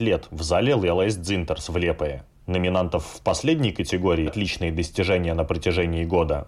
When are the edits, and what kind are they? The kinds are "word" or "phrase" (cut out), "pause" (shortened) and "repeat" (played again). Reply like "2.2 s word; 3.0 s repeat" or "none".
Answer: 4.3 s word